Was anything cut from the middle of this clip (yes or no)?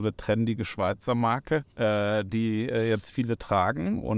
yes